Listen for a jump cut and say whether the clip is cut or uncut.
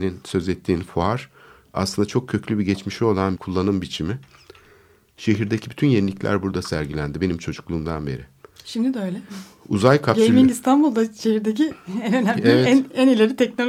cut